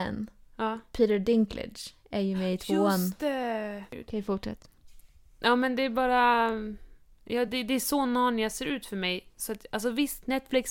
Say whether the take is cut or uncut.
uncut